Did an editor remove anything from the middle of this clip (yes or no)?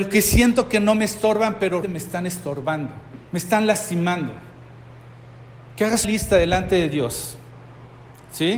yes